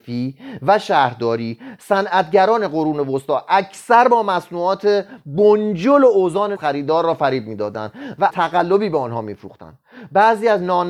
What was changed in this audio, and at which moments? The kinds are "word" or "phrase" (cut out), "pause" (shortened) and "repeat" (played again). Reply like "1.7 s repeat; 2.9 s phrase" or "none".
6.5 s word; 8.3 s word